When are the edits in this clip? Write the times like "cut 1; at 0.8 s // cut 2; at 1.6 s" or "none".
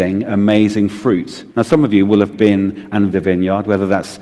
cut 1; at 1.5 s // cut 2; at 2.3 s // cut 3; at 3.1 s